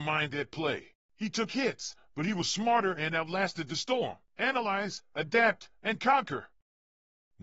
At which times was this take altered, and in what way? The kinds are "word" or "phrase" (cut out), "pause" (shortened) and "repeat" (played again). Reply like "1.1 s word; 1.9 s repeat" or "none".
0.9 s pause; 4.3 s pause